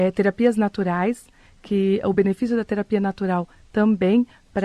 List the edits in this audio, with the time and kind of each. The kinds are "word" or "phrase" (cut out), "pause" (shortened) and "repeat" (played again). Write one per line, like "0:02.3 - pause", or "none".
none